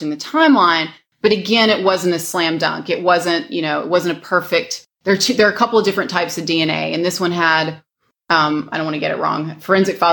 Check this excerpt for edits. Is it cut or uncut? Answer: uncut